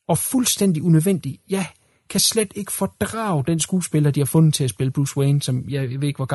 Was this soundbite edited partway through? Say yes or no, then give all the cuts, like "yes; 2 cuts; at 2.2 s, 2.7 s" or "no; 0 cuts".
no; 0 cuts